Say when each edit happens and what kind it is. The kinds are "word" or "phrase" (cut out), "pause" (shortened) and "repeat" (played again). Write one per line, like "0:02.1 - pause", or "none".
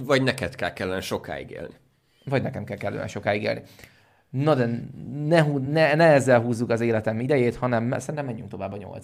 none